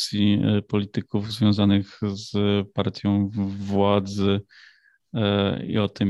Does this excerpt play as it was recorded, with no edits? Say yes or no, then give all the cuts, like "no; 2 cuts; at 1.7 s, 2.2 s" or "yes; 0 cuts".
yes; 0 cuts